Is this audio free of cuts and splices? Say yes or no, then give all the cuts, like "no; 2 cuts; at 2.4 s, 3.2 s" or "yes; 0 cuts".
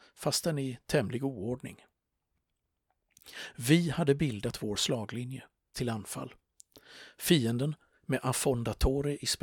no; 1 cut; at 5.7 s